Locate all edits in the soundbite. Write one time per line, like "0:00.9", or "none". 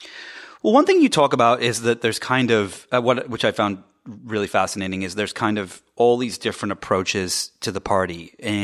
none